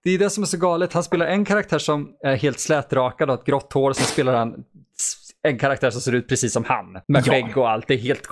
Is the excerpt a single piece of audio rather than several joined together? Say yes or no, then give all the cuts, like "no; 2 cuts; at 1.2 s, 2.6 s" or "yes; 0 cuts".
no; 1 cut; at 7.0 s